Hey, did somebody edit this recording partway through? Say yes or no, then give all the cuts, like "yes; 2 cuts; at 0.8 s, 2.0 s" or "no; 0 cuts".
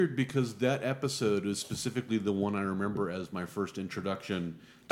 no; 0 cuts